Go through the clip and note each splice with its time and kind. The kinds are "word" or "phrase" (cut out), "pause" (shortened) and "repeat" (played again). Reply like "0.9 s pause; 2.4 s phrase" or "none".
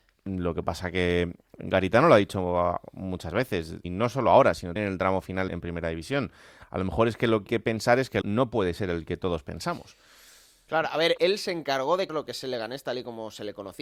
3.8 s word; 4.8 s word; 5.5 s word; 7.5 s word; 8.2 s word; 11.2 s word; 12.1 s word